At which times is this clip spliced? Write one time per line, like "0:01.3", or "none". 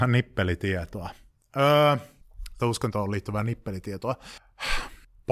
0:02.6

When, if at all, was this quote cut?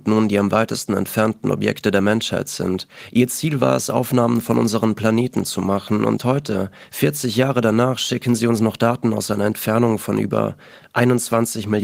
0:06.2

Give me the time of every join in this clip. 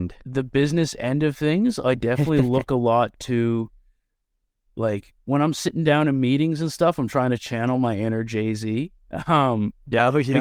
none

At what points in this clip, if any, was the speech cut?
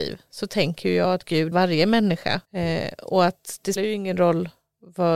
0:01.5
0:02.4
0:03.8

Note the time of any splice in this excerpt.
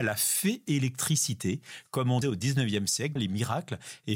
0:02.2
0:03.2

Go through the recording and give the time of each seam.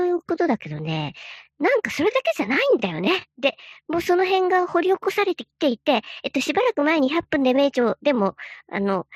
0:03.3

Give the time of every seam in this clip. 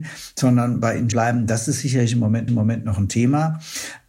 0:01.1
0:02.5

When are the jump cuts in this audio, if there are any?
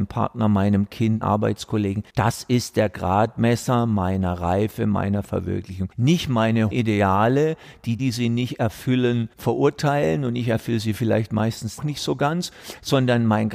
0:01.2
0:02.1
0:05.9
0:06.7
0:08.0
0:09.3
0:11.8

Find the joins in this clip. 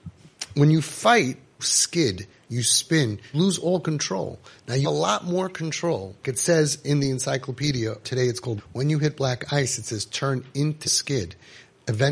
0:01.6
0:03.3
0:04.8
0:06.2
0:08.0
0:08.6
0:10.8

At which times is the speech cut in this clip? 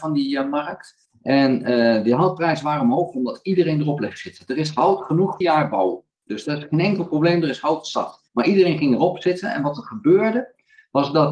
0:01.1
0:05.4
0:08.3

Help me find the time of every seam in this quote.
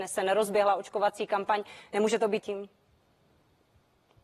0:02.4

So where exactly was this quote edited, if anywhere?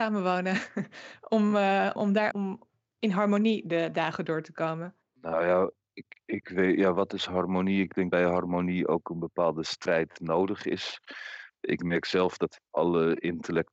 0:02.0
0:02.3
0:08.1

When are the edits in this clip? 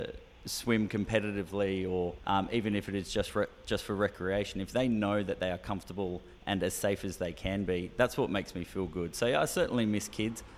0:02.2

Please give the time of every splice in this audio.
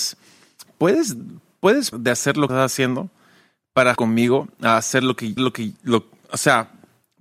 0:01.9
0:02.5
0:04.0
0:05.4

